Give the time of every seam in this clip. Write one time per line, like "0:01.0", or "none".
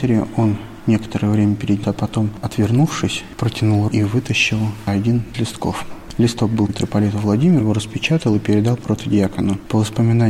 0:01.8
0:03.9
0:05.3
0:06.7
0:07.6